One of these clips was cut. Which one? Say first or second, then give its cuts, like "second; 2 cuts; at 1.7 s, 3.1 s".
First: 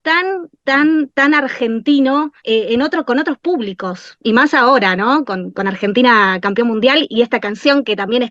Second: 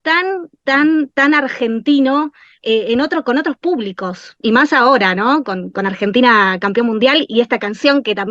first; 1 cut; at 2.4 s